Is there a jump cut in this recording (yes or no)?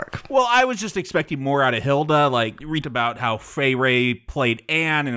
yes